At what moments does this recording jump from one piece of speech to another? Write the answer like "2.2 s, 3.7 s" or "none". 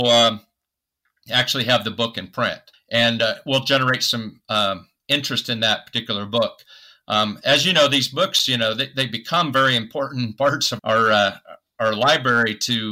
2.7 s, 10.8 s